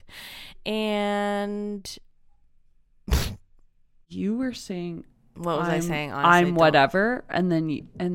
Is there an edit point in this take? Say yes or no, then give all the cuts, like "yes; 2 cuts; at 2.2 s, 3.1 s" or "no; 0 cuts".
no; 0 cuts